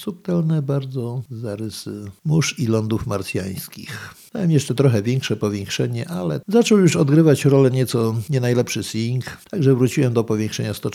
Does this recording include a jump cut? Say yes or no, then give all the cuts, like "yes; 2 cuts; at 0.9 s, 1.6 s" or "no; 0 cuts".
no; 0 cuts